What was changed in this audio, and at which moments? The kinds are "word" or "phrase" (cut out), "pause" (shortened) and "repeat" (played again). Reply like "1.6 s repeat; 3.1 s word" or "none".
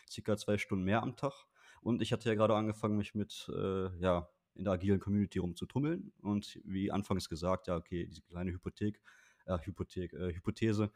none